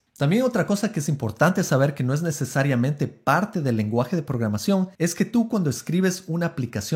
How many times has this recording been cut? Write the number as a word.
one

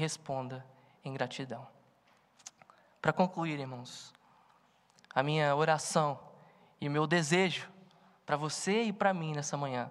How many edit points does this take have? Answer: zero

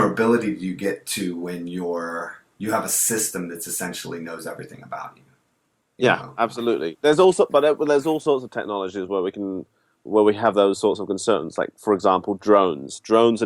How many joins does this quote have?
zero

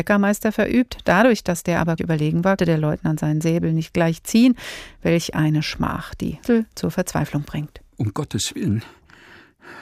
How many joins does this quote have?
four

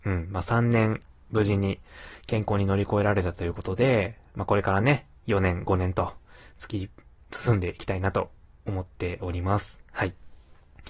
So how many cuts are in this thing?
zero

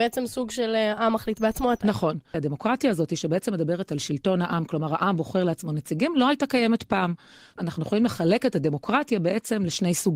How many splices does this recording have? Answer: one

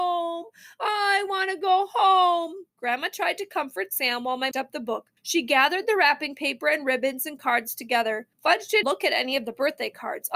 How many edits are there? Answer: five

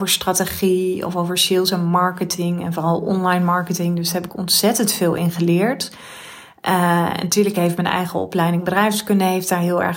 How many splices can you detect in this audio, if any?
zero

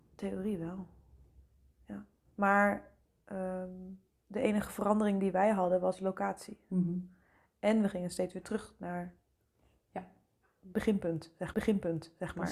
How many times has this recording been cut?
one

